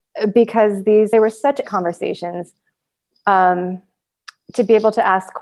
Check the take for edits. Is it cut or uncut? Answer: cut